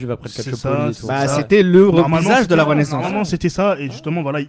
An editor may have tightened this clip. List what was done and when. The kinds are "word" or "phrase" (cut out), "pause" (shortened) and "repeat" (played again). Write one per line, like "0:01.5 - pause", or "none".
none